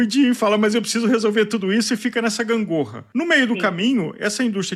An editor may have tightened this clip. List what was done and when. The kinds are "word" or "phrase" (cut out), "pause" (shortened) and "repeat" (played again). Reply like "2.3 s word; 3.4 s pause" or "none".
none